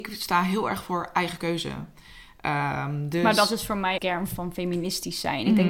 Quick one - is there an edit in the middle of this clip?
yes; 1 cut; at 4.0 s

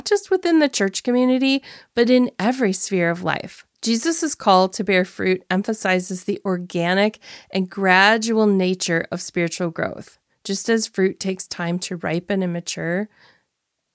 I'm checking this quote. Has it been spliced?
yes; 2 cuts; at 3.7 s, 10.3 s

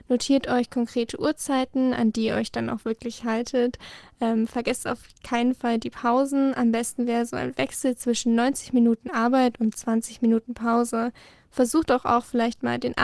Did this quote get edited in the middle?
no; 0 cuts

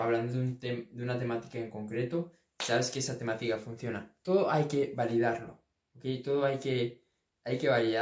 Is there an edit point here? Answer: no; 0 cuts

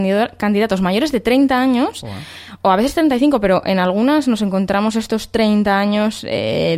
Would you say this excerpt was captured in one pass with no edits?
yes; 0 cuts

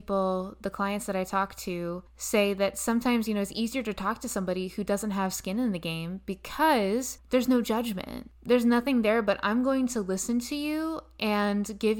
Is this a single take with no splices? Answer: no; 1 cut; at 2.1 s

